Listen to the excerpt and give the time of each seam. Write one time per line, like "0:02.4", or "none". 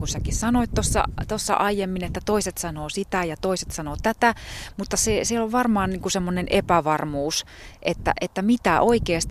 none